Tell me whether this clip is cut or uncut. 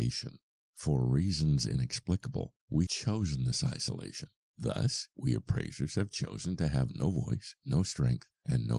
cut